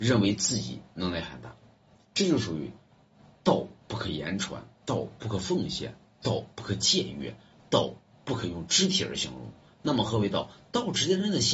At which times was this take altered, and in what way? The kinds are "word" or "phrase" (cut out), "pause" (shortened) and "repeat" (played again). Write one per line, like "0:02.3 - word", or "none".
none